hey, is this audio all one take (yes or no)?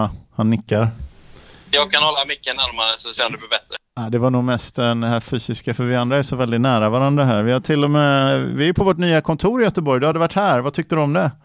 yes